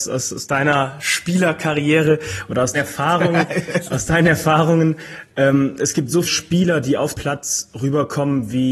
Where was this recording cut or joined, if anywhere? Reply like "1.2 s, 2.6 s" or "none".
2.7 s, 6.2 s, 7.1 s